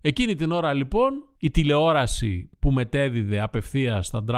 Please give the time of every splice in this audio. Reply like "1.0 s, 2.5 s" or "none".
1.3 s